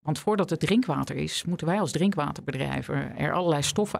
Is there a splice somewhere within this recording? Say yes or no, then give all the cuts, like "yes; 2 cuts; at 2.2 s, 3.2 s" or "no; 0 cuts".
no; 0 cuts